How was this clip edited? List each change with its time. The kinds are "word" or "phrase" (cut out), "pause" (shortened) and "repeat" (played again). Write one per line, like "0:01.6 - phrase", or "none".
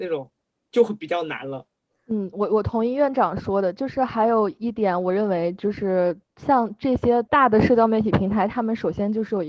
0:01.8 - pause
0:06.2 - pause
0:07.3 - pause